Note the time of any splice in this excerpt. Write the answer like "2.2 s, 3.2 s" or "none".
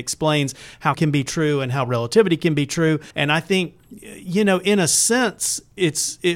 0.9 s, 3.1 s